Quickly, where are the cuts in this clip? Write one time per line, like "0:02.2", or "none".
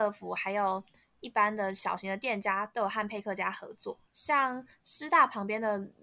0:04.1